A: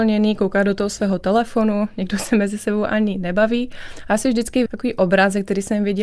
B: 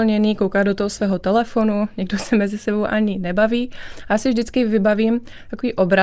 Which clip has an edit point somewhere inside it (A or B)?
A